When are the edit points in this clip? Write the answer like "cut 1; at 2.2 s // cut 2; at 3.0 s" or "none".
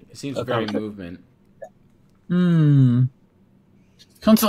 none

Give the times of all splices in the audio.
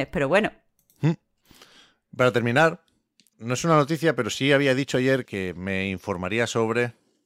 cut 1; at 3.3 s // cut 2; at 5.3 s

